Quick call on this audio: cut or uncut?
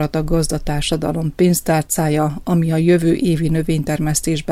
uncut